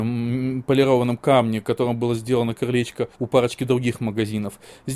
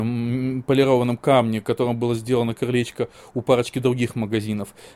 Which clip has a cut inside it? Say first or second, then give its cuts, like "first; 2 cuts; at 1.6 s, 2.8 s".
first; 1 cut; at 3.1 s